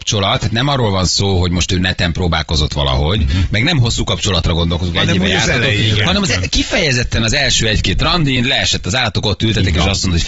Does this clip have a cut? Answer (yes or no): no